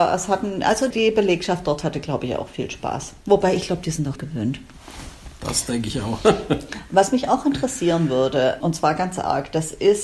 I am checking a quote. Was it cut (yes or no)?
yes